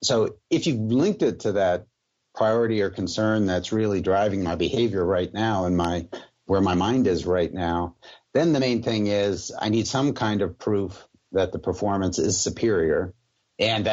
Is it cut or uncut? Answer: uncut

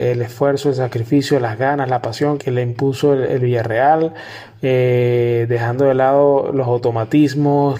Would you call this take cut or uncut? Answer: cut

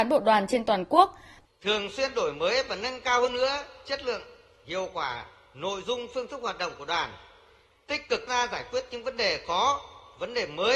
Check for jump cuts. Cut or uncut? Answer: cut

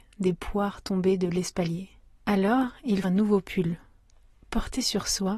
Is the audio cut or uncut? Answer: cut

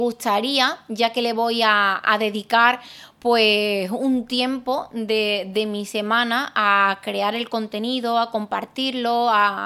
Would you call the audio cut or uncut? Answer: uncut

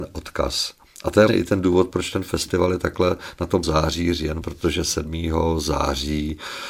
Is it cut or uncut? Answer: cut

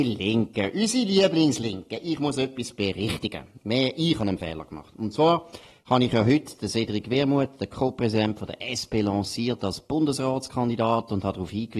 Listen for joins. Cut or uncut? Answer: uncut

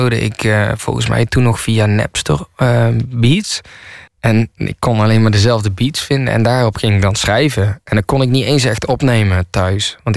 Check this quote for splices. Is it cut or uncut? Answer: cut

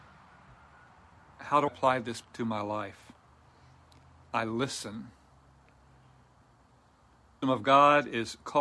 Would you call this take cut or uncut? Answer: cut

